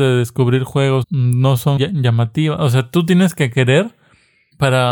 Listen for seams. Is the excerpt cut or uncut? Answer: cut